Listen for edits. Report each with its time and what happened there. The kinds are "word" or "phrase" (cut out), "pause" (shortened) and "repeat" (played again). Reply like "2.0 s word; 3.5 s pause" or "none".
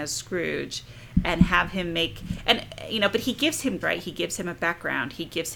3.8 s word